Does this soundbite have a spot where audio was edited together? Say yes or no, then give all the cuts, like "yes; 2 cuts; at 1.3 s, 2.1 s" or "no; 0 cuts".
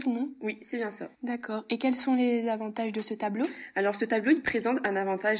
yes; 1 cut; at 1.1 s